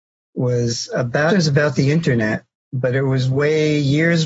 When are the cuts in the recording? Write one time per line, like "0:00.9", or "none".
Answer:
0:01.3